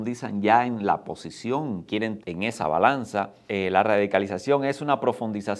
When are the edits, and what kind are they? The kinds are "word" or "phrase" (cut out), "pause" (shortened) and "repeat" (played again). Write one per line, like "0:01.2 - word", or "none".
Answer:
0:01.8 - word
0:02.2 - word
0:03.5 - word